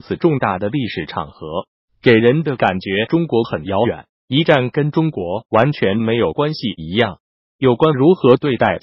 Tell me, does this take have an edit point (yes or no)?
no